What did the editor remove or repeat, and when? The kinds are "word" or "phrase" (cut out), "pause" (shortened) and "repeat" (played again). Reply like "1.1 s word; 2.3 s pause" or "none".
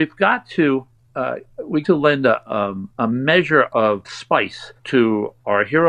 0.9 s pause; 1.8 s word; 2.9 s pause; 4.0 s word; 4.8 s pause